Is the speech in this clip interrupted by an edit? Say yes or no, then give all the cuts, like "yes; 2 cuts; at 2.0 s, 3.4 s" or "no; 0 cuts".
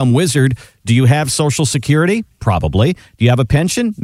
no; 0 cuts